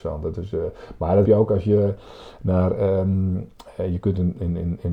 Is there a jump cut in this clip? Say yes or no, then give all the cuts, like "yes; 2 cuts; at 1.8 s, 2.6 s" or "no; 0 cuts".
yes; 1 cut; at 1.2 s